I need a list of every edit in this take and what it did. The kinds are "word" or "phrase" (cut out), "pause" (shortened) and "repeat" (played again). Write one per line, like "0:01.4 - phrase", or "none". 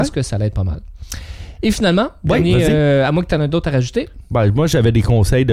none